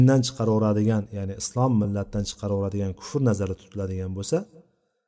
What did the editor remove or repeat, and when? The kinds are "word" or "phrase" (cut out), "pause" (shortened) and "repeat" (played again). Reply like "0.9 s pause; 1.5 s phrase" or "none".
none